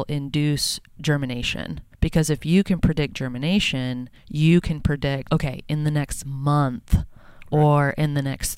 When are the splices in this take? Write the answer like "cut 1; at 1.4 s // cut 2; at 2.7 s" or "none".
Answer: cut 1; at 1.9 s // cut 2; at 4.2 s // cut 3; at 5.3 s